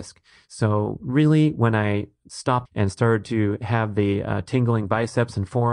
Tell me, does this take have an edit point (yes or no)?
yes